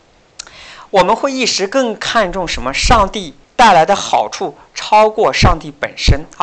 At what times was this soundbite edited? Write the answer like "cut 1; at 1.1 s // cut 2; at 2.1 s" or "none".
cut 1; at 3.4 s